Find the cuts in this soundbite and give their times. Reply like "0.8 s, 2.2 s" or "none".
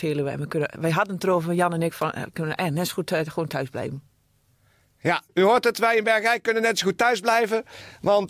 none